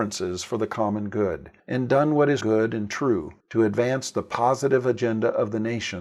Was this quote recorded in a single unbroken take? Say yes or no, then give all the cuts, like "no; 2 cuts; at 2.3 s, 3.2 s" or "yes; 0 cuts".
no; 3 cuts; at 1.6 s, 2.4 s, 3.4 s